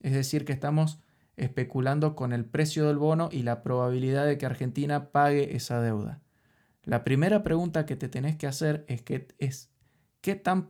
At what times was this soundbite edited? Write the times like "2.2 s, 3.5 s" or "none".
none